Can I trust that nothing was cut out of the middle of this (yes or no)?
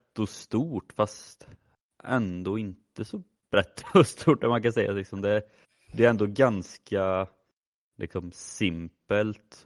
yes